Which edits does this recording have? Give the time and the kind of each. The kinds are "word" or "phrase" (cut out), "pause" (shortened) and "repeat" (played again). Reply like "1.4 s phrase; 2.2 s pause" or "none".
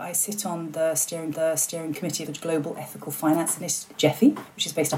1.3 s repeat; 2.3 s phrase; 3.9 s word